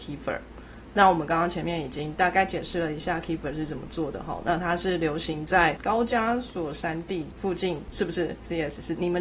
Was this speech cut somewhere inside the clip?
no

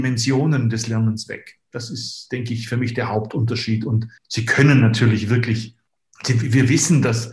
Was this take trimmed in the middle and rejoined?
yes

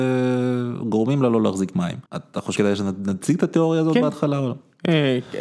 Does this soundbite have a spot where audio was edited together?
yes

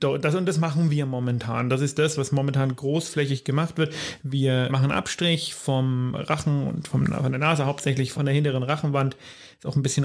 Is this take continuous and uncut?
no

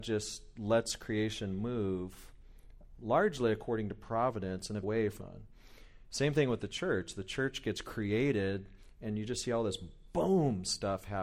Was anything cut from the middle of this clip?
yes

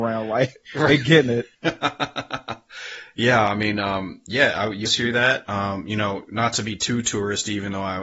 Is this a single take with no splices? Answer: no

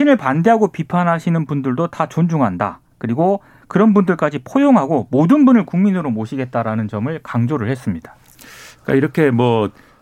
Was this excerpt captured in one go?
yes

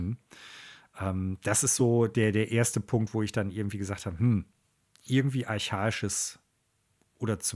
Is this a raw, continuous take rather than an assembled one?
yes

